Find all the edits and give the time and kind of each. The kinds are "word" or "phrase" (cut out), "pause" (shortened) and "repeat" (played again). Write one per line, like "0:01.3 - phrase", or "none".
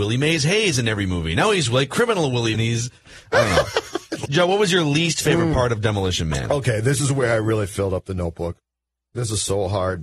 0:02.5 - phrase
0:04.3 - word